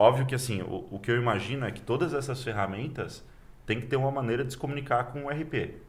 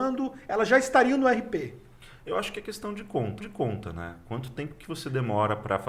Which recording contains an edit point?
second; 1 cut; at 3.4 s

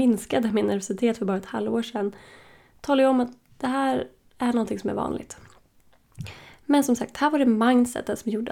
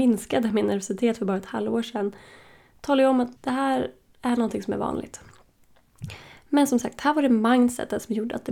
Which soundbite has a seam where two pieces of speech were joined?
second; 1 cut; at 3.4 s

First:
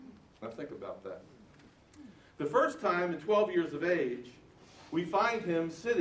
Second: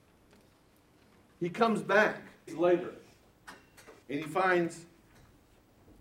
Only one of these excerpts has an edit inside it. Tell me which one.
second; 2 cuts; at 2.5 s, 4.0 s

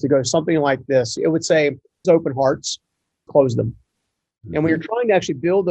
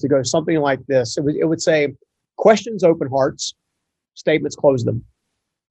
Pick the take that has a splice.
first; 3 cuts; at 1.2 s, 2.0 s, 3.3 s

